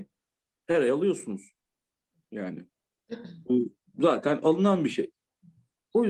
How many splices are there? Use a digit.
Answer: 0